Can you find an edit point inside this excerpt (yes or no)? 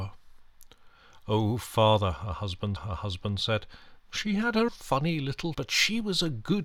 yes